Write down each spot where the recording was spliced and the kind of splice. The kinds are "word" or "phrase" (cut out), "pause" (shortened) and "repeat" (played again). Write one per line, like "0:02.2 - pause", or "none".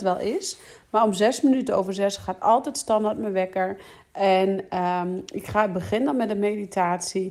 none